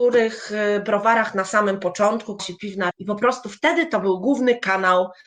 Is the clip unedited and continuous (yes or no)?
no